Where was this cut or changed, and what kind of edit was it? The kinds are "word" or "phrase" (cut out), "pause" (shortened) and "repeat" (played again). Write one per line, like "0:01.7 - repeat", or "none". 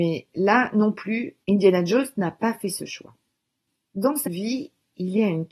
0:04.3 - word